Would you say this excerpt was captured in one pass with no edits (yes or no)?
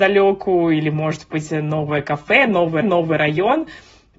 no